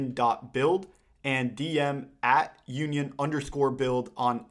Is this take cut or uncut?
uncut